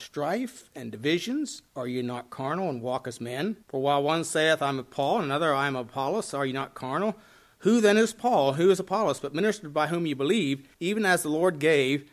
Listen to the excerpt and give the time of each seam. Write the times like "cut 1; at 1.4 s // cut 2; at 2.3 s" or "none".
cut 1; at 3.6 s // cut 2; at 10.7 s